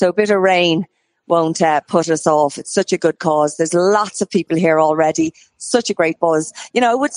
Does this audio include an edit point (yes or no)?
no